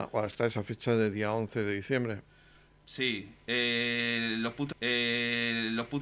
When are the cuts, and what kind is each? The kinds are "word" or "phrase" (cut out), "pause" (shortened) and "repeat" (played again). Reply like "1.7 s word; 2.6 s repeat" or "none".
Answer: 4.7 s repeat